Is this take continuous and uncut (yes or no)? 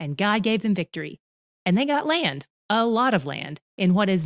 yes